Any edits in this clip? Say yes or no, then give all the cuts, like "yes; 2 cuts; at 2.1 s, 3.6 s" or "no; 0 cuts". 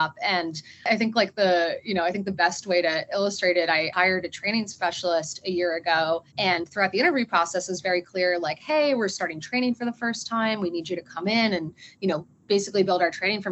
yes; 1 cut; at 6.3 s